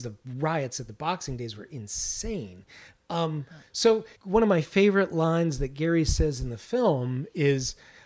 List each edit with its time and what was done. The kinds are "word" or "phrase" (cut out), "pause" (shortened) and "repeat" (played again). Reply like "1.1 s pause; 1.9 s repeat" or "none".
4.1 s pause